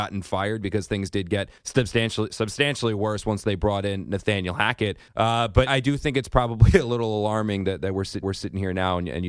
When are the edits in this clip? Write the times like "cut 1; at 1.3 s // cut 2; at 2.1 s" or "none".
cut 1; at 1.6 s // cut 2; at 5.1 s // cut 3; at 5.7 s // cut 4; at 8.2 s